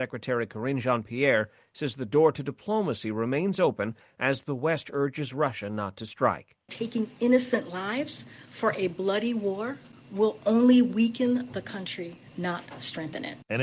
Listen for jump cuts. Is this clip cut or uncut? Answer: uncut